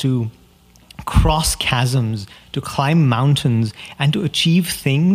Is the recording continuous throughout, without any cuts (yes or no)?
yes